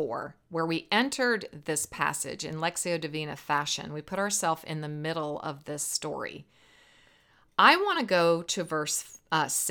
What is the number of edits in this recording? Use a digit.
0